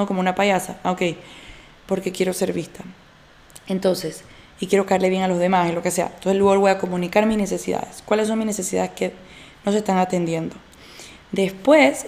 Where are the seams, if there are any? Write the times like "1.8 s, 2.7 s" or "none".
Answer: none